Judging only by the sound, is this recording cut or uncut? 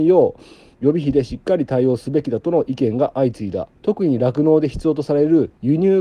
cut